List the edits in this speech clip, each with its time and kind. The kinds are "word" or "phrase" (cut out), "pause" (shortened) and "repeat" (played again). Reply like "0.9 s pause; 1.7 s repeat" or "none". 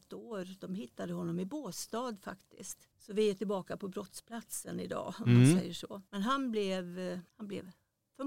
2.9 s pause; 6.1 s pause; 7.3 s pause